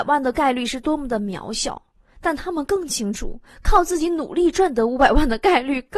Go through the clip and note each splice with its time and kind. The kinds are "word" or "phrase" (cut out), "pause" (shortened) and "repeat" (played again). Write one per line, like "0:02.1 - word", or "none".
none